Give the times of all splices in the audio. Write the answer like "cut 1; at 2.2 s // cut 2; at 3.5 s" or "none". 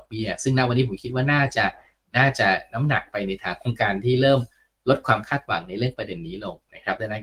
none